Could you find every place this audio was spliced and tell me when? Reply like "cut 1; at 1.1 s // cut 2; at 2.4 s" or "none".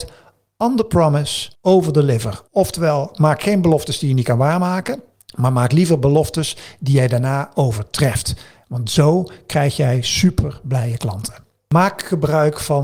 cut 1; at 1.5 s // cut 2; at 2.5 s // cut 3; at 5.1 s